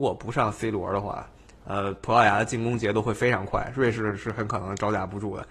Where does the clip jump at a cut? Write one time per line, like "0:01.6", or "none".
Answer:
none